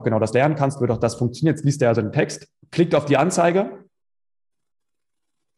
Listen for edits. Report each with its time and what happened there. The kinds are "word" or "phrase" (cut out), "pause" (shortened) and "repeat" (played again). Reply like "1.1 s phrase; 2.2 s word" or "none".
2.6 s pause